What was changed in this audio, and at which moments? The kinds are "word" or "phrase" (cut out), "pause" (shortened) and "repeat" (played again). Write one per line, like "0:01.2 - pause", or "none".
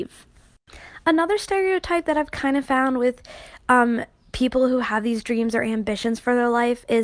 none